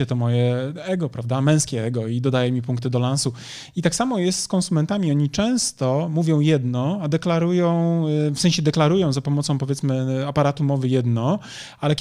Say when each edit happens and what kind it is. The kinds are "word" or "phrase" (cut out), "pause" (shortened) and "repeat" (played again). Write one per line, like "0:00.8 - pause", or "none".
none